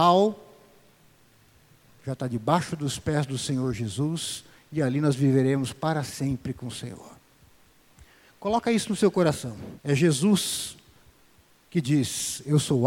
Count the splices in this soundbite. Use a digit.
1